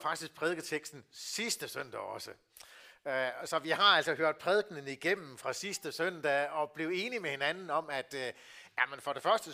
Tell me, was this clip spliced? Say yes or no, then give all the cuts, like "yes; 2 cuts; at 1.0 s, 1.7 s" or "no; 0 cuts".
no; 0 cuts